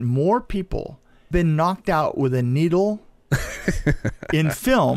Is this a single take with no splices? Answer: no; 1 cut; at 1.3 s

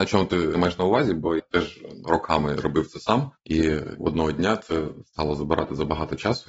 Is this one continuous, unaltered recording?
no; 2 cuts; at 1.4 s, 2.0 s

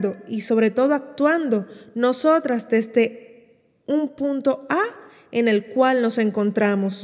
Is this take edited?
no; 0 cuts

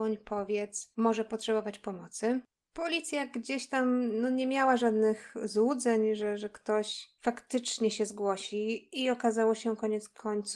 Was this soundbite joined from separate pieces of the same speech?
no; 0 cuts

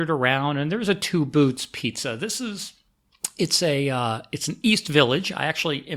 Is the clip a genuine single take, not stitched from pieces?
yes; 0 cuts

